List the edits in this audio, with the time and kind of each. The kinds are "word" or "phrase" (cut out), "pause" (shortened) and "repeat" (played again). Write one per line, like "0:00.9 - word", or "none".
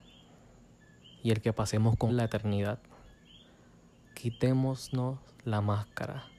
0:01.4 - word
0:02.1 - word